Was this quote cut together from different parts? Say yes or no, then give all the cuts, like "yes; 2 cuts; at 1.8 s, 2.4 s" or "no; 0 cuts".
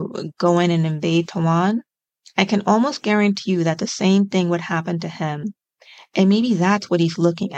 no; 0 cuts